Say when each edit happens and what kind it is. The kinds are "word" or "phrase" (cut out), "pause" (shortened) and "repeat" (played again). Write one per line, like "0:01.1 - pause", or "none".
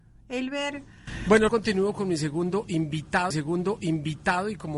0:01.5 - phrase
0:03.3 - repeat